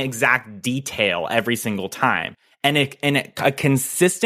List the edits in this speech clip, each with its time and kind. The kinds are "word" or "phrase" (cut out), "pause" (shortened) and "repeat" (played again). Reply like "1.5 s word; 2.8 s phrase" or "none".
none